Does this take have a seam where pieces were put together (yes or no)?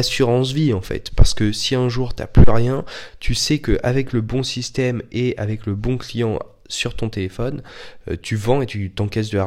no